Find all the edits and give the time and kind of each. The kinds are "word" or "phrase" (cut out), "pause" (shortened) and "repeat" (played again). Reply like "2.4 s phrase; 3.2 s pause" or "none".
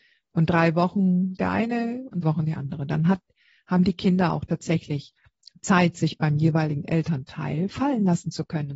1.4 s word; 2.2 s word